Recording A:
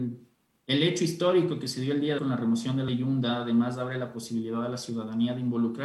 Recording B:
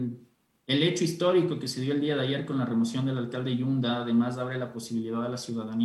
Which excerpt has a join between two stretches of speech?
A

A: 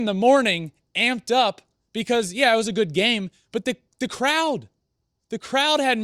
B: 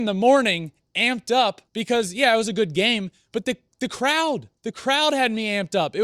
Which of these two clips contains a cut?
B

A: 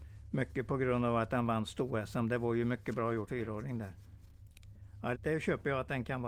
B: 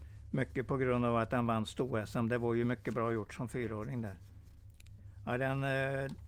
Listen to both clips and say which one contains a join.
A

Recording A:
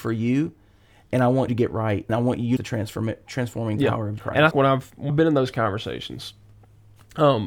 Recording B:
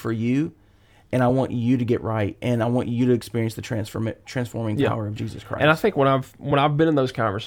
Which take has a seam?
A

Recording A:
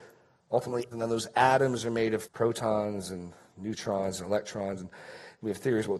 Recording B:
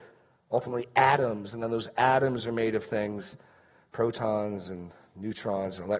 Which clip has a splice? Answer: A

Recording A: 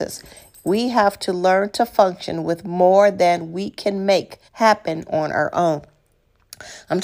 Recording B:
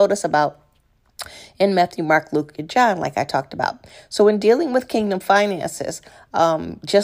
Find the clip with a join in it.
A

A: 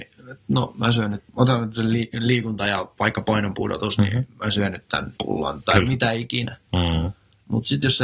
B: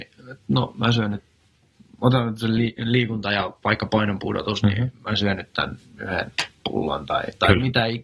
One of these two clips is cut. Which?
A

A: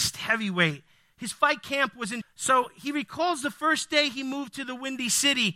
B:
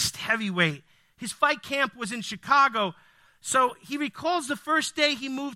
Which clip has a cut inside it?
A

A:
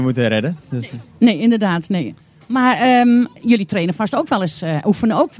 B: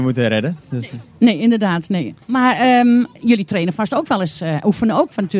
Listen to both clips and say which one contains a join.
B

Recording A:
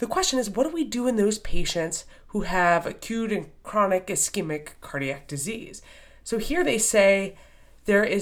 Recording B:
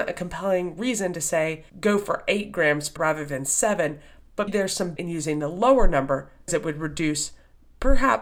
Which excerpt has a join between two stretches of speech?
B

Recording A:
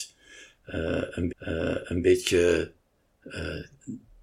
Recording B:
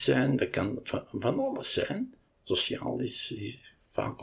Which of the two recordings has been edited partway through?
A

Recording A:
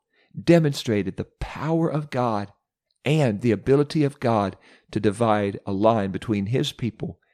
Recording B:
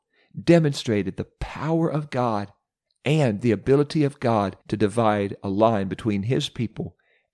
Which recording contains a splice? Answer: B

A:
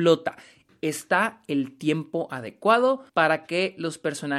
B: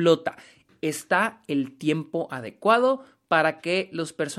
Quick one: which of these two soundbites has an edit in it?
A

